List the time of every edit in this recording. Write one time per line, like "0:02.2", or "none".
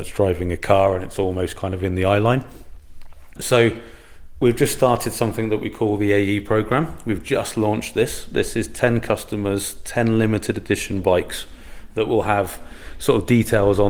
none